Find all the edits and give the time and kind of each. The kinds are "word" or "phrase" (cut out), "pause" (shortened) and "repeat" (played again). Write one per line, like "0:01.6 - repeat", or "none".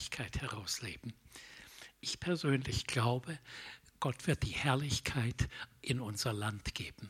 0:01.9 - pause